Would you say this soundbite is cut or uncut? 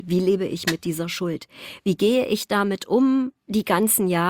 uncut